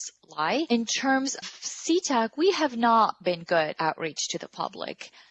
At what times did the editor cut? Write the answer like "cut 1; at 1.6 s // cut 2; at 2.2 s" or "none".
cut 1; at 1.4 s // cut 2; at 3.8 s

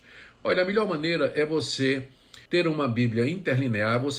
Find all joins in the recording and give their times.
cut 1; at 2.5 s

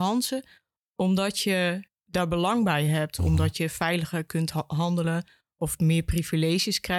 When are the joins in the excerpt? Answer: none

